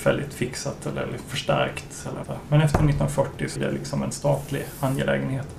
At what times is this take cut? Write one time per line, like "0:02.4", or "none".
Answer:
0:02.2
0:03.6

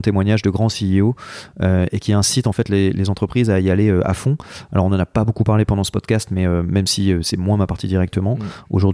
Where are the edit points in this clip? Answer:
none

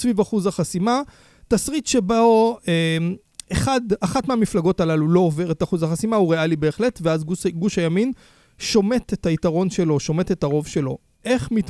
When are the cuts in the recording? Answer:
none

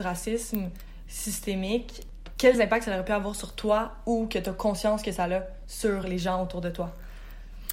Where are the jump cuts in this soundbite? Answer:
none

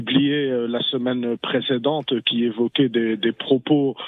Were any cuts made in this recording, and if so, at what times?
none

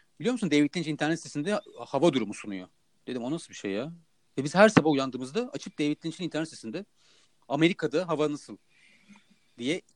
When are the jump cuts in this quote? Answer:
none

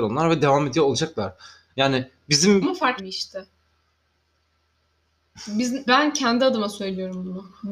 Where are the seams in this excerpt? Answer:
0:02.6
0:03.0
0:05.9

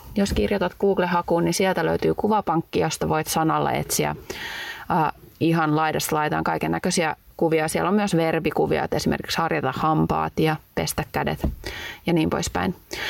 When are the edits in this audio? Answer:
none

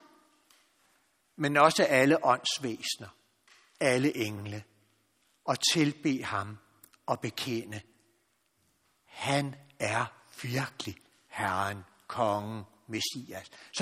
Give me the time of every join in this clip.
none

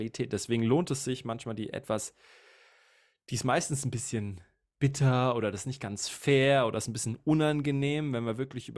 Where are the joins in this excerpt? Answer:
none

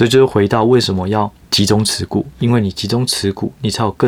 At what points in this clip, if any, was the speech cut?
0:01.4

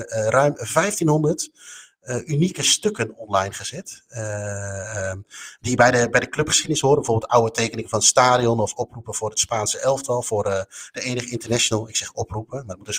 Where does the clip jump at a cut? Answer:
none

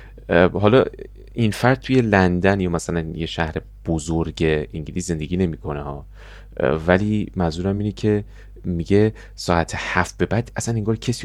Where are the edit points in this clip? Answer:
none

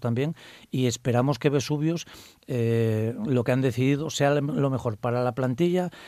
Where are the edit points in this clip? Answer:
none

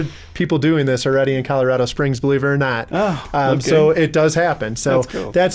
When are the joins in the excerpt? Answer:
none

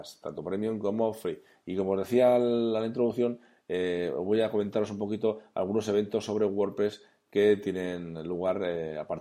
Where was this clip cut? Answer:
none

